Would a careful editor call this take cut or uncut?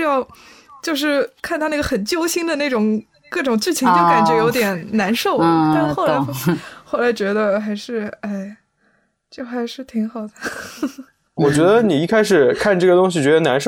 cut